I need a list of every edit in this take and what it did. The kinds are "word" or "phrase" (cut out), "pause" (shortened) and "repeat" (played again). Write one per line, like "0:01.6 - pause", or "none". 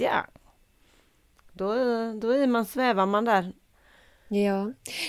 none